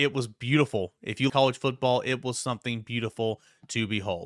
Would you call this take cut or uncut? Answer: cut